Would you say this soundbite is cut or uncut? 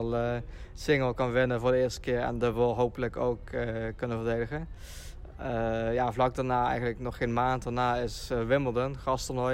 uncut